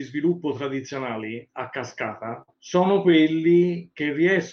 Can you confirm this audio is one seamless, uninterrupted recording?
no; 1 cut; at 2.5 s

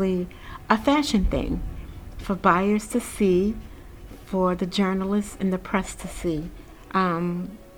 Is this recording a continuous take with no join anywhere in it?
yes; 0 cuts

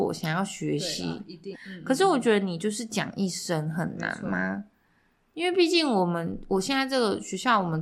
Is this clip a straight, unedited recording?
no; 1 cut; at 1.5 s

